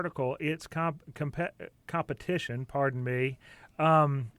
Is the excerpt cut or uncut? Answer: uncut